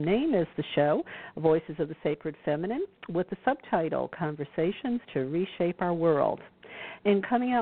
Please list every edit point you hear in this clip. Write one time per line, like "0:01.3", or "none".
none